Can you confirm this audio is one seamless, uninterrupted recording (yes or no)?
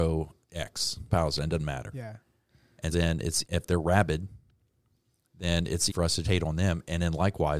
no